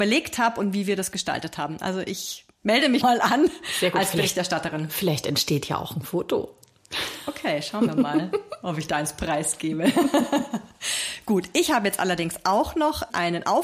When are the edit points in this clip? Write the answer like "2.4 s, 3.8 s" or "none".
3.0 s